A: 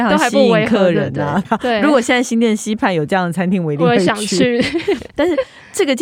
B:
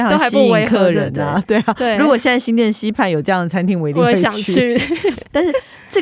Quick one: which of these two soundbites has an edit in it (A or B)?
A